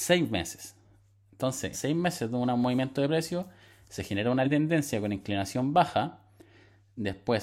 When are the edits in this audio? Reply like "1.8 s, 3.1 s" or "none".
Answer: 1.7 s, 4.4 s